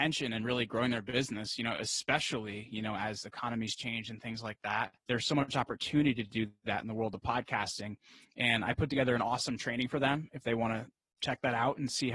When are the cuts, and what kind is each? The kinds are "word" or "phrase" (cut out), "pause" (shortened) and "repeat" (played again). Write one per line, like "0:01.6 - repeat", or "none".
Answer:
0:05.0 - pause